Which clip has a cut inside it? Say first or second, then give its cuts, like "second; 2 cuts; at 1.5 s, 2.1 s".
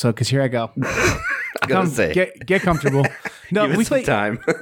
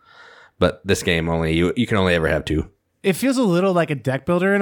first; 1 cut; at 1.7 s